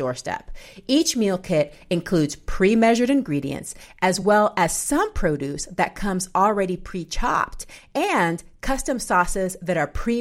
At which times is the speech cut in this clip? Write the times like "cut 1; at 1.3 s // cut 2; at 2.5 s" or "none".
none